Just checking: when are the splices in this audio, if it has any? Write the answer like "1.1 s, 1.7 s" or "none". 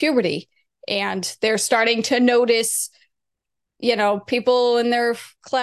none